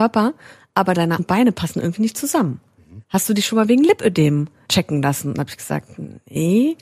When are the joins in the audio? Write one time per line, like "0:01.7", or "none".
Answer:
0:01.2
0:03.0